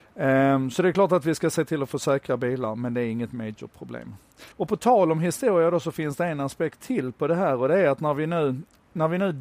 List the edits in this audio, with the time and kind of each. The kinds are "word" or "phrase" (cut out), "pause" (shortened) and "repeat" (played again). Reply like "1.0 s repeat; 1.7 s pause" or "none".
4.5 s pause